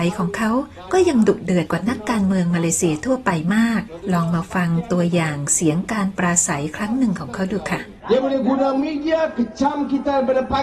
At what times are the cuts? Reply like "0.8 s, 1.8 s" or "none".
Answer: 8.0 s